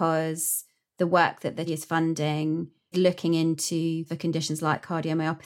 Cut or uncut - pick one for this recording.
cut